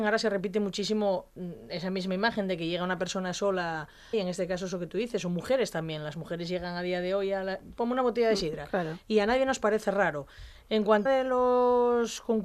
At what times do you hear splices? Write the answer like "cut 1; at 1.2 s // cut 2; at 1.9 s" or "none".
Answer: cut 1; at 4.1 s // cut 2; at 11.1 s